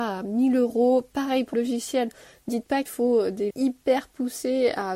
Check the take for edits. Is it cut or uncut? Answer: cut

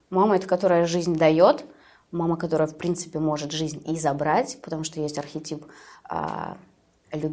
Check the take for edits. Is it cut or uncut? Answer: uncut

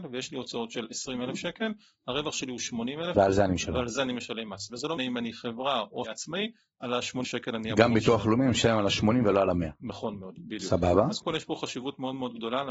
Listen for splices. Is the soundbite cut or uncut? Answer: cut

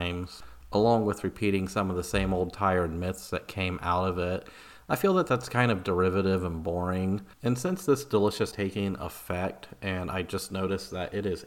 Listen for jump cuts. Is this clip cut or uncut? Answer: cut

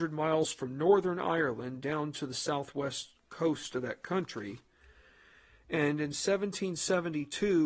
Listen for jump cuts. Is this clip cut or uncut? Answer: uncut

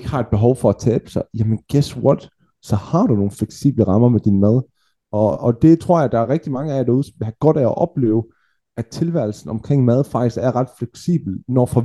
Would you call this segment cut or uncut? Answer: uncut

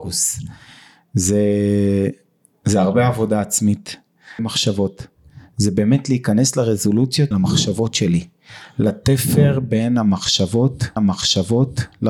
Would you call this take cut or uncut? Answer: cut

